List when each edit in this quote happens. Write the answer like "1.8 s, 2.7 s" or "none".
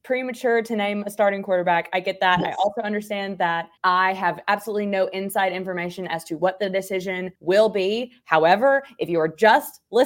3.8 s, 7.3 s